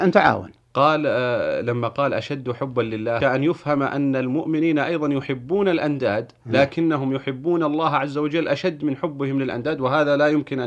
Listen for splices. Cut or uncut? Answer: cut